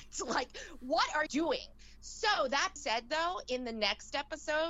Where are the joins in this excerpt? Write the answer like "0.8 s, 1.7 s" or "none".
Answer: 1.3 s, 2.8 s